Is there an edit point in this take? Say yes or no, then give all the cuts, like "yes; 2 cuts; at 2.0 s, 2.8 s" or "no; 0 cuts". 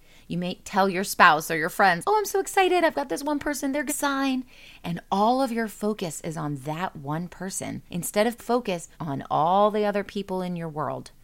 yes; 5 cuts; at 2.0 s, 3.9 s, 7.9 s, 8.4 s, 8.9 s